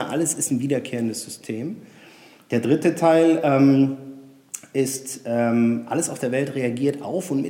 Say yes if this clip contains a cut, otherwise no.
no